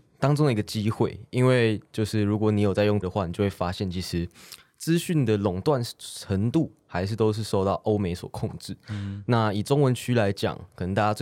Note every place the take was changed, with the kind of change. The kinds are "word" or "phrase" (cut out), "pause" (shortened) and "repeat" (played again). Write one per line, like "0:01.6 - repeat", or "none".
0:03.0 - word